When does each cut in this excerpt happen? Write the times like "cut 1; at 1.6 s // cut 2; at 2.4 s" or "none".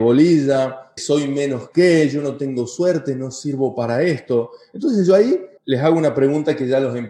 cut 1; at 1.0 s // cut 2; at 5.6 s